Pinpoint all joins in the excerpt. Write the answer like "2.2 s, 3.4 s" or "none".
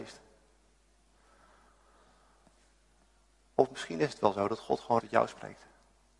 5.0 s